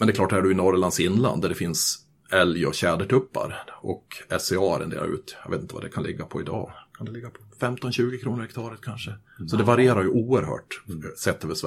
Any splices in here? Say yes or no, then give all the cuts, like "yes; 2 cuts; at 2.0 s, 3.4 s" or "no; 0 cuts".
no; 0 cuts